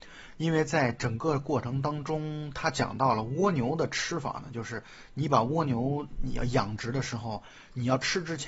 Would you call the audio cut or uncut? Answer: uncut